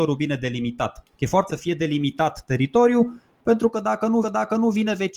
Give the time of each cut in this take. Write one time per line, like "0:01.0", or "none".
0:01.1
0:01.5
0:04.2